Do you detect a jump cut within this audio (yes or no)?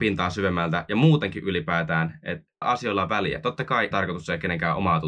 yes